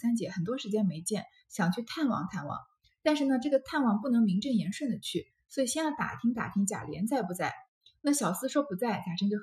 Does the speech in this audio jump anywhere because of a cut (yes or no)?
no